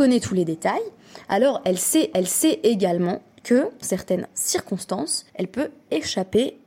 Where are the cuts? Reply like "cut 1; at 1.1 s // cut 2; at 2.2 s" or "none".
cut 1; at 2.1 s // cut 2; at 3.8 s // cut 3; at 5.3 s